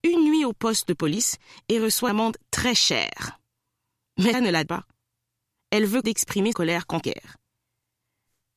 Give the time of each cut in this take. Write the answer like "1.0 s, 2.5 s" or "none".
2.1 s, 4.3 s, 4.7 s, 6.0 s, 6.5 s, 7.0 s